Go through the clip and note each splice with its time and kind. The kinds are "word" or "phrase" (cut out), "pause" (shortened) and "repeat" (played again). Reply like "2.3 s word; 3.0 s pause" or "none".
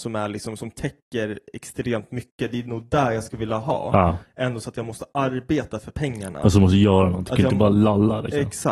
none

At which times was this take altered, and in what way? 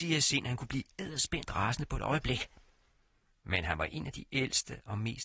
none

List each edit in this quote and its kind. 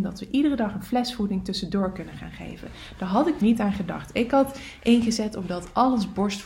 3.4 s phrase

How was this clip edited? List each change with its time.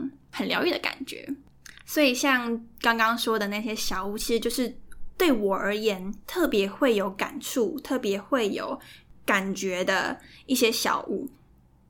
none

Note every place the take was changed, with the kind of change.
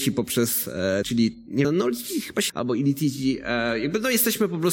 1.0 s word; 1.6 s word; 2.5 s word

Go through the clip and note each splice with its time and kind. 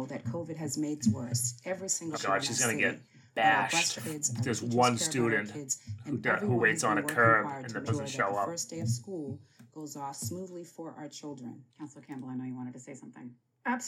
1.0 s word; 2.1 s word; 4.0 s phrase; 7.9 s word; 11.7 s pause

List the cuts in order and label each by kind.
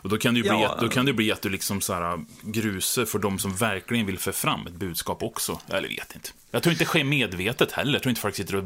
none

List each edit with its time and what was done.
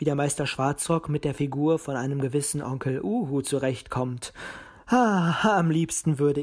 none

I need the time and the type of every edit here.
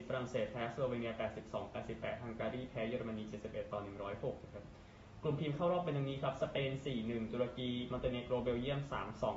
5.4 s word

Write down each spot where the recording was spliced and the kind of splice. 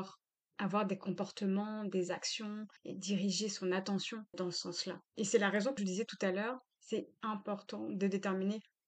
2.8 s pause; 4.3 s word; 5.1 s pause; 5.8 s phrase

